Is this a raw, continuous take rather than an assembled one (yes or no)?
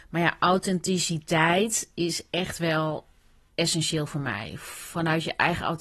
yes